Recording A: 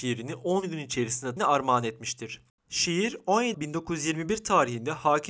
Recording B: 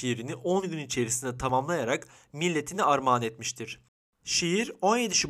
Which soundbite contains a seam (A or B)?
A